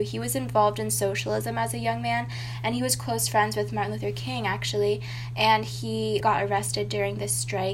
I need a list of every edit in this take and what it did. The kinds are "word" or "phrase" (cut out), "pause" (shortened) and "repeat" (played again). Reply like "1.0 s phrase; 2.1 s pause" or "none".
6.2 s word